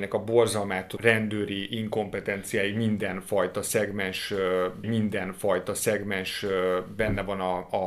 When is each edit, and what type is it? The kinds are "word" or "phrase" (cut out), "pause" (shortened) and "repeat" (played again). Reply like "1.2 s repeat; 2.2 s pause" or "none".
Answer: 1.0 s word; 4.8 s repeat